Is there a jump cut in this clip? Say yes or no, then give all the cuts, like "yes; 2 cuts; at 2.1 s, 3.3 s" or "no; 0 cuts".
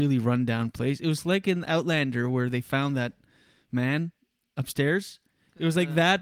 no; 0 cuts